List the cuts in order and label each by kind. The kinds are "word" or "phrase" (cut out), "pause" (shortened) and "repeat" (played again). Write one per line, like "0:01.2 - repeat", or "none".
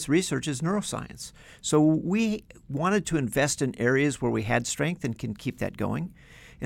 none